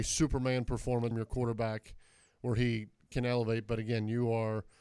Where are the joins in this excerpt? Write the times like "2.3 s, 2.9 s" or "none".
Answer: 1.1 s